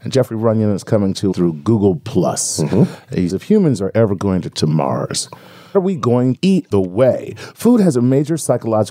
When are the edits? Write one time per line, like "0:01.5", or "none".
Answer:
0:01.3
0:03.3
0:04.5
0:05.7
0:06.4
0:06.7

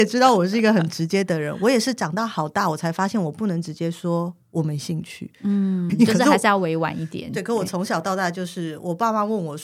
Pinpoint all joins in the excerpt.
0:05.9

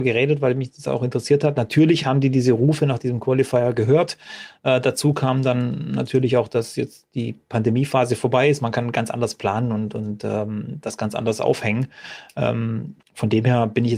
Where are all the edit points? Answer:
0:13.0

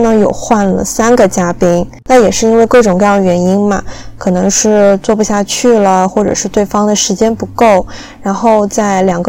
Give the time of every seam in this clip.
0:02.0

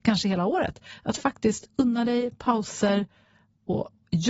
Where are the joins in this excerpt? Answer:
none

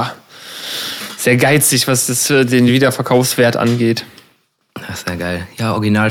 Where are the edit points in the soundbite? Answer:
none

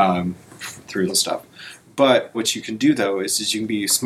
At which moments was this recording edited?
0:01.1
0:02.3

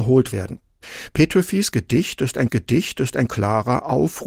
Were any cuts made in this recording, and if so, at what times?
0:02.5

